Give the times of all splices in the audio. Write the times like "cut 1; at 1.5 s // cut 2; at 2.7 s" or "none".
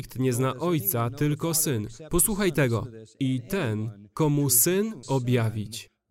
cut 1; at 5.0 s